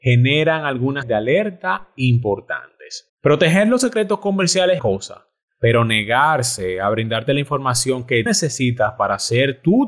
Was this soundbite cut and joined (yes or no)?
yes